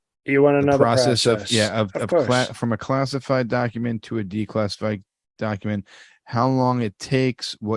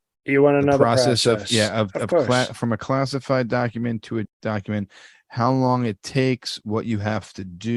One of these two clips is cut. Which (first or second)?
second